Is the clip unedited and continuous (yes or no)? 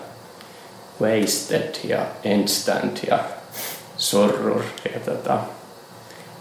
yes